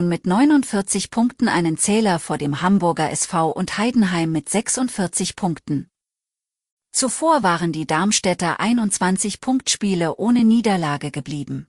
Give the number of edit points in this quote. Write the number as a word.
zero